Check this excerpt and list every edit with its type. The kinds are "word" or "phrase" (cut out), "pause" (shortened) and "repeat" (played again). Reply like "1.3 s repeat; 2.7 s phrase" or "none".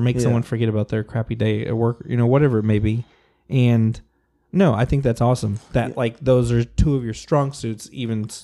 none